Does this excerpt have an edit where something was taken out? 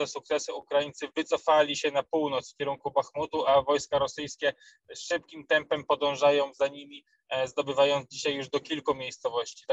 no; 0 cuts

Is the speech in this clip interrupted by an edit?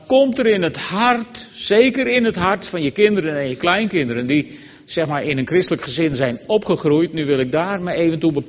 no; 0 cuts

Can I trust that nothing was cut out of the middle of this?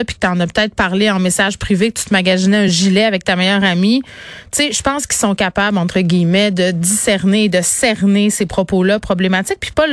yes; 0 cuts

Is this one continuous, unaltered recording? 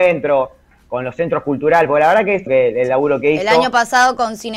no; 1 cut; at 2.5 s

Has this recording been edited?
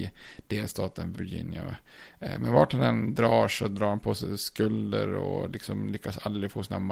yes; 1 cut; at 1.1 s

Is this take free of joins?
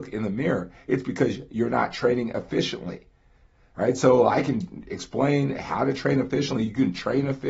yes; 0 cuts

